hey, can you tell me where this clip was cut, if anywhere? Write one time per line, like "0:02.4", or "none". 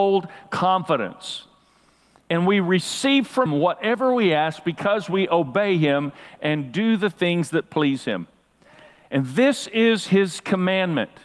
0:03.5

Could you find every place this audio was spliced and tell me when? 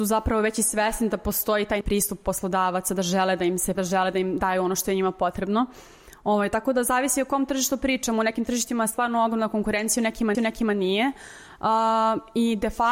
0:01.8
0:03.7
0:10.3

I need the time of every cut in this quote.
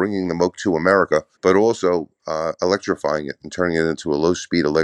0:01.3

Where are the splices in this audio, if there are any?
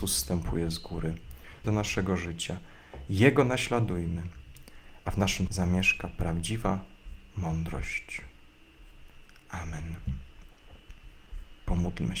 0:01.6
0:05.5

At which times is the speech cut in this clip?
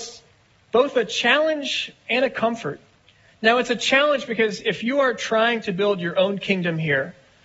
0:03.0

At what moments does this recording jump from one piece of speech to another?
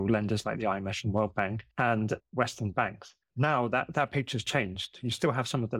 0:01.7
0:03.2

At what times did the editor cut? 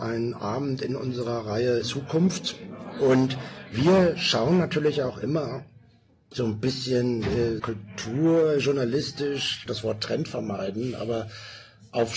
0:01.8
0:07.6
0:09.7

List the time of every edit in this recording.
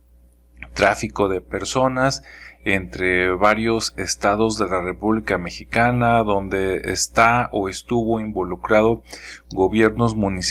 none

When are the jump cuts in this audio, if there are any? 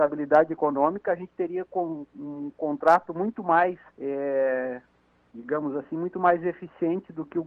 0:03.9

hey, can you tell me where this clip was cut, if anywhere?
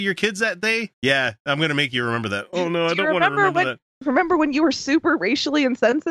0:00.9

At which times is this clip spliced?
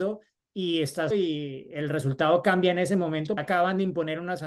0:01.1
0:03.4

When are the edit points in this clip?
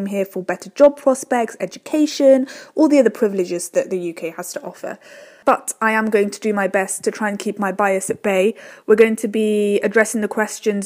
none

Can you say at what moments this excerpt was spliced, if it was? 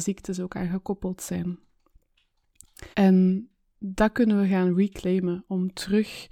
0:02.9

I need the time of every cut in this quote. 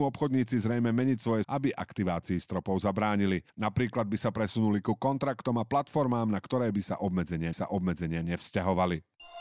0:01.4
0:03.5
0:07.5

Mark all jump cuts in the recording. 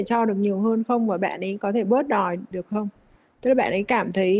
none

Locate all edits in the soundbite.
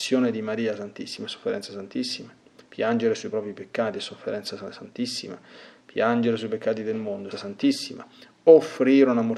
0:07.3

